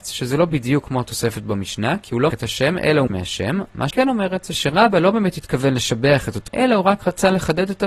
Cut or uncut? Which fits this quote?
cut